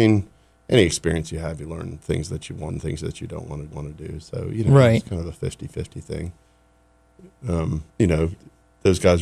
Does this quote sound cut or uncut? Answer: cut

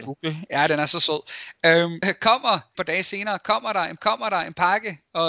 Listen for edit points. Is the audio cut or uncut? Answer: cut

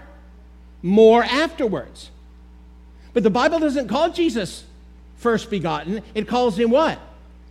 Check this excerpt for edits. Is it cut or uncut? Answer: uncut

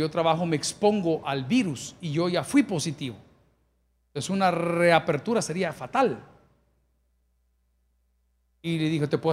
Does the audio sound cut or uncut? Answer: uncut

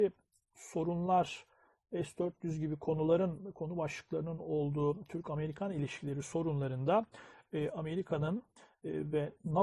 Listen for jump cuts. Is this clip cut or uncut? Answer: uncut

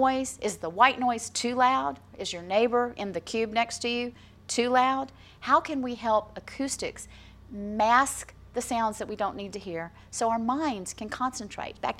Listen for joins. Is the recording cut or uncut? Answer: uncut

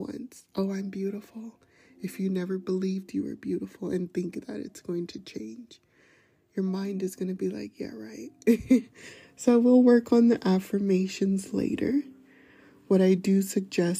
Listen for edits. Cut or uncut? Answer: uncut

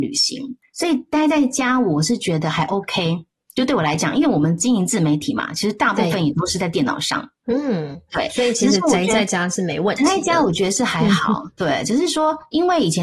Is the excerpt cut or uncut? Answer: uncut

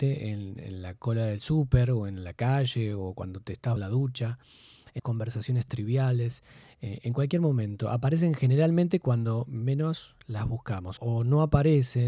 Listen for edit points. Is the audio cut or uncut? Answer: cut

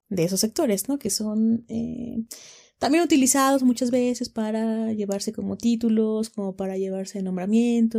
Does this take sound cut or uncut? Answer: uncut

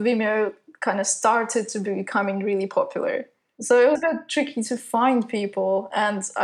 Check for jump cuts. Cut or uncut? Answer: cut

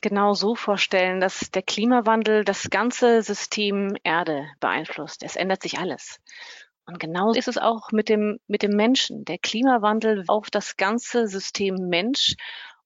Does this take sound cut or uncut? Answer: cut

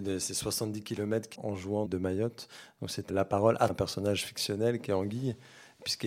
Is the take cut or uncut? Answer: cut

